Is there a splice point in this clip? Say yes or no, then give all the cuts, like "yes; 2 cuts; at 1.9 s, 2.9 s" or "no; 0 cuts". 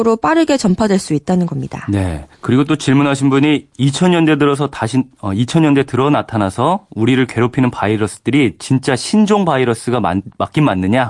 yes; 1 cut; at 2.3 s